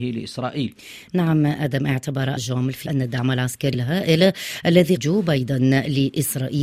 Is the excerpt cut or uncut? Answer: cut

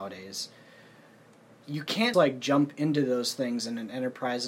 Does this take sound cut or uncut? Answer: cut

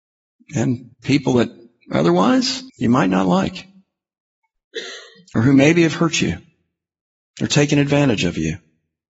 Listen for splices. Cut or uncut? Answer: cut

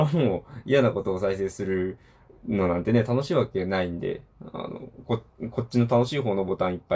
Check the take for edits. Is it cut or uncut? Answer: uncut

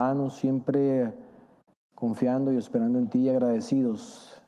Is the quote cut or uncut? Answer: uncut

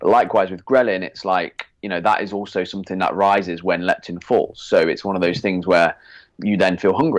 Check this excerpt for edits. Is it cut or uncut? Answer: uncut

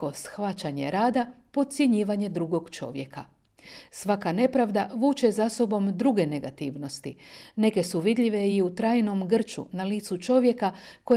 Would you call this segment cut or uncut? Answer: uncut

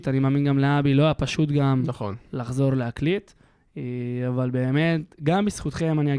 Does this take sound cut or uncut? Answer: uncut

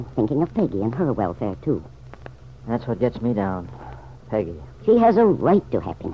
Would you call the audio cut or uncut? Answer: uncut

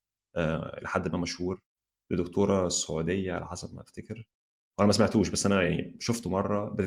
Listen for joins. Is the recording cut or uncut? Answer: uncut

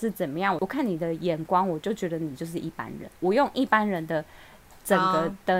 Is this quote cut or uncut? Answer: cut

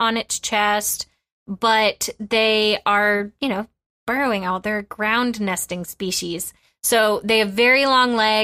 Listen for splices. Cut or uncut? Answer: uncut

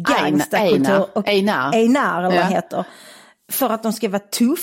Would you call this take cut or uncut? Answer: uncut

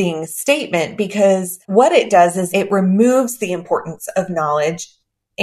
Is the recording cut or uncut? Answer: cut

